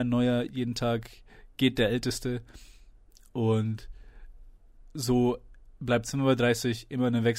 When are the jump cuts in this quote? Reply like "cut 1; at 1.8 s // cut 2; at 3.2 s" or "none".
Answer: none